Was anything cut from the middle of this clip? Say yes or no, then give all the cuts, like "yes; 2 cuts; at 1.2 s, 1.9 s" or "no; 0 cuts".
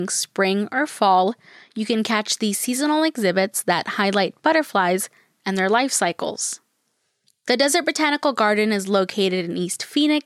no; 0 cuts